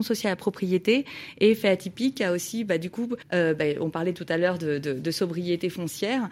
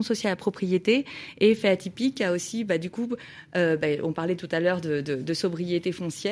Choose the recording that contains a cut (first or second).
first